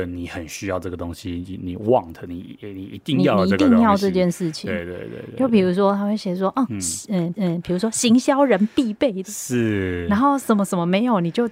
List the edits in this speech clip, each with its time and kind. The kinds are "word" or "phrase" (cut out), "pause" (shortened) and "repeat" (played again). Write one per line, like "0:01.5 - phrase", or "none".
0:07.3 - repeat